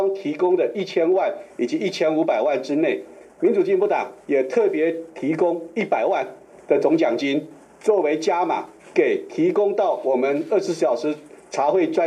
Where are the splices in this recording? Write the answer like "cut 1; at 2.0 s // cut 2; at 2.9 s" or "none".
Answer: cut 1; at 3.3 s // cut 2; at 4.2 s // cut 3; at 8.9 s